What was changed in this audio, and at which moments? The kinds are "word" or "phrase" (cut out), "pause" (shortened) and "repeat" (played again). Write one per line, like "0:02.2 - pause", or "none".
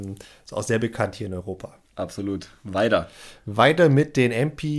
0:01.8 - pause